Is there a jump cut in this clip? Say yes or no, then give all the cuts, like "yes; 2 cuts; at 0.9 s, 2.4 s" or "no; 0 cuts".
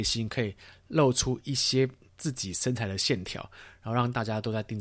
no; 0 cuts